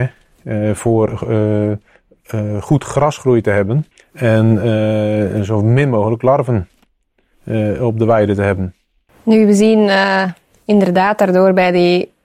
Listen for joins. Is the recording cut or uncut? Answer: cut